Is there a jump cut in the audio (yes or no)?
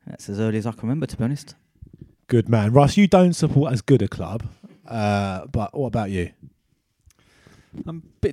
yes